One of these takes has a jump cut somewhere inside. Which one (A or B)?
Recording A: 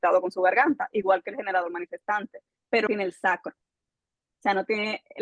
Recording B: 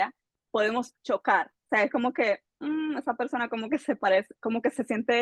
A